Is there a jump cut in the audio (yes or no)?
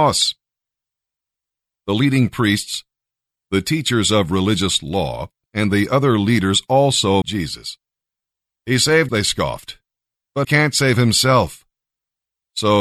yes